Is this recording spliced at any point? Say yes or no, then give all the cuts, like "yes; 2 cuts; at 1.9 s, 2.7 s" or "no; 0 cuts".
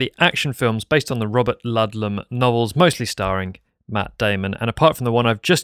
no; 0 cuts